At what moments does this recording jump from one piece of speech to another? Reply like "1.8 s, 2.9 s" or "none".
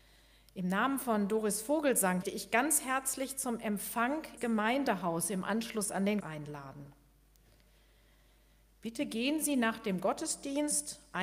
2.2 s, 4.4 s, 6.2 s